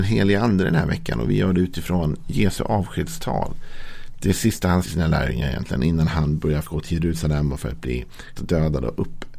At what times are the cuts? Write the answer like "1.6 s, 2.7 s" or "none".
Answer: 4.8 s, 6.6 s, 8.4 s

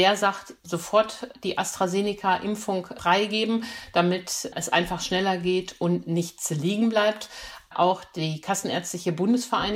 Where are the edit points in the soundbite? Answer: none

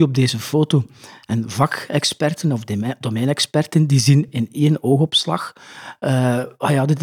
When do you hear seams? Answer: none

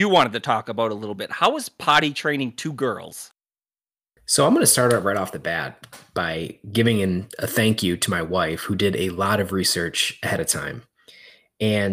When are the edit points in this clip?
none

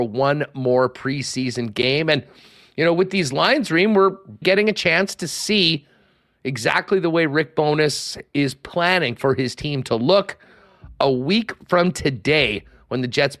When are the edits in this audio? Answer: 4.4 s

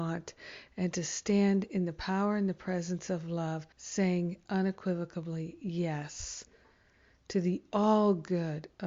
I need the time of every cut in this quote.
3.7 s

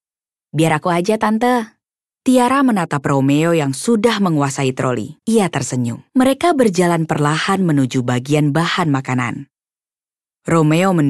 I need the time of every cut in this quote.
1.9 s, 5.2 s, 6.1 s

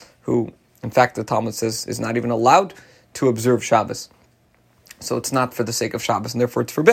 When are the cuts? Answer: none

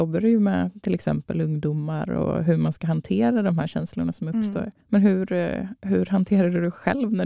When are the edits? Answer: 4.8 s, 5.8 s

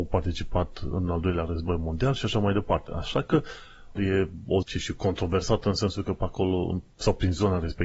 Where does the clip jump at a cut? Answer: 4.0 s, 4.6 s

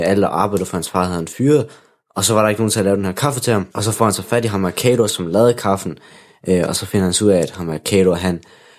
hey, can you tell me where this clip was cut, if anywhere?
3.7 s

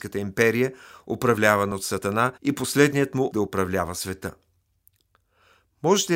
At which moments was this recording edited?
2.4 s, 3.3 s

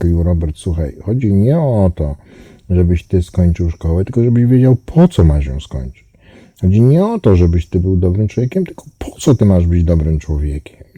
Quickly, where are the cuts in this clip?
none

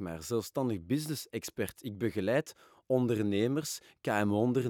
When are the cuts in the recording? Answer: none

